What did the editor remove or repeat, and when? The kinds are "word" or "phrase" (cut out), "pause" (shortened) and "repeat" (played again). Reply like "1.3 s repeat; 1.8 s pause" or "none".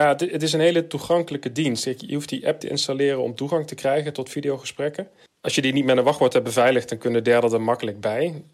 2.6 s word; 5.3 s pause